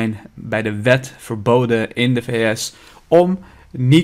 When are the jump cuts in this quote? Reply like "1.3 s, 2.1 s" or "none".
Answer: none